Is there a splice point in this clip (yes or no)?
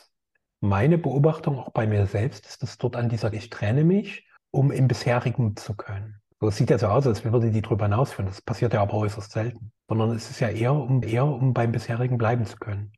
yes